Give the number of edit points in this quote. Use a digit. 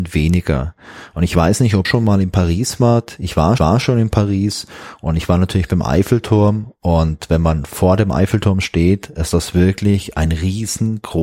2